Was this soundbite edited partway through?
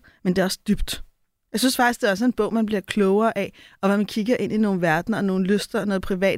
no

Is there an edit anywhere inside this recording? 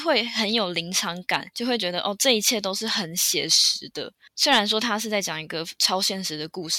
no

